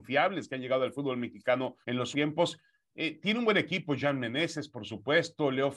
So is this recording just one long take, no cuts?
no; 2 cuts; at 1.8 s, 2.1 s

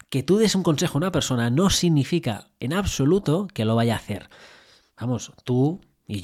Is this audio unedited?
yes; 0 cuts

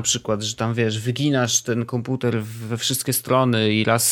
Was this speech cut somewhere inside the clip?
no; 0 cuts

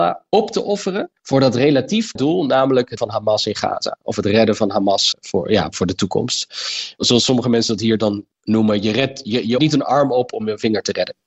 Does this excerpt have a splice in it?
yes; 6 cuts; at 1.2 s, 2.2 s, 3.0 s, 5.1 s, 8.3 s, 9.6 s

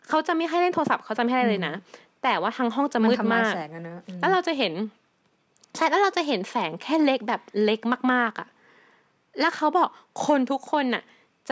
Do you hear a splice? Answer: no; 0 cuts

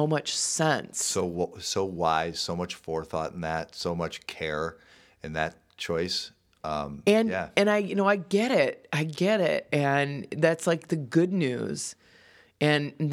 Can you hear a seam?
no; 0 cuts

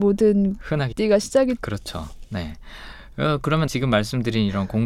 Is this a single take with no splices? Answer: no; 3 cuts; at 0.9 s, 1.6 s, 3.7 s

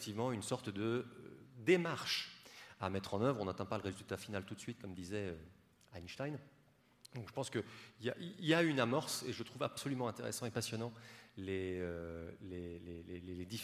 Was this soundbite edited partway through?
no; 0 cuts

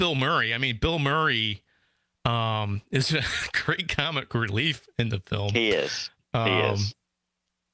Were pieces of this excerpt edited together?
no; 0 cuts

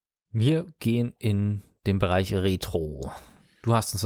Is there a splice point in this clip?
no; 0 cuts

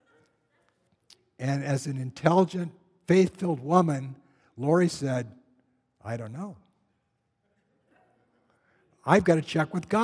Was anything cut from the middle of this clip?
no; 0 cuts

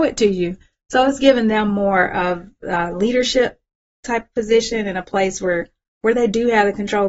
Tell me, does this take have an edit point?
no; 0 cuts

